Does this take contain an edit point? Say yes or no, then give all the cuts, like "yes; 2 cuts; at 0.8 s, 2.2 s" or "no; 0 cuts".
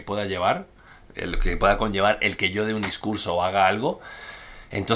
no; 0 cuts